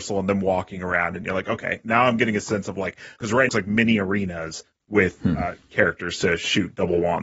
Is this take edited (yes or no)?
yes